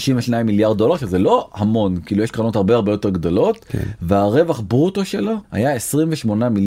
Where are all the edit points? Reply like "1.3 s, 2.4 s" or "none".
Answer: 5.4 s